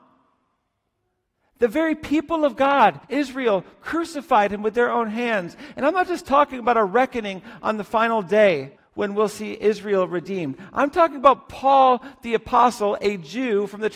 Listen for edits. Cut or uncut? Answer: cut